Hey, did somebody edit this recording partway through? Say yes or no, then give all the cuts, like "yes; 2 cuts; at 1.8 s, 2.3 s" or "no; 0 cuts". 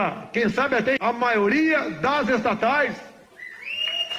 yes; 1 cut; at 1.0 s